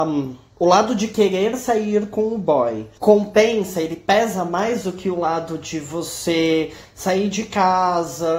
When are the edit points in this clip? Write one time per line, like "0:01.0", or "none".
none